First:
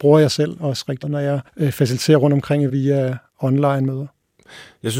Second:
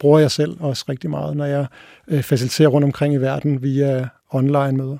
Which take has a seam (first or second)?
first